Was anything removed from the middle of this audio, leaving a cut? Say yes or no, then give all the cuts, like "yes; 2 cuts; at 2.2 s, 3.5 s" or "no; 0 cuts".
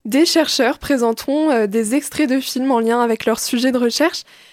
no; 0 cuts